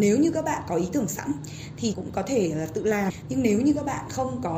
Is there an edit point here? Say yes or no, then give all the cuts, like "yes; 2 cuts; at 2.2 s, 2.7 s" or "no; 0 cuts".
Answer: yes; 1 cut; at 1.9 s